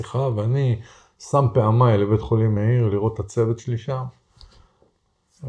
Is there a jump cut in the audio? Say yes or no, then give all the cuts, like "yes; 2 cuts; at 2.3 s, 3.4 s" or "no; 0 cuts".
no; 0 cuts